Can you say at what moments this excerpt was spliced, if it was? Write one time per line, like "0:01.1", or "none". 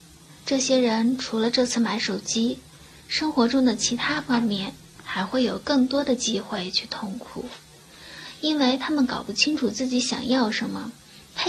none